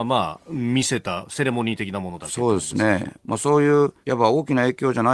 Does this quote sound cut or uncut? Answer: cut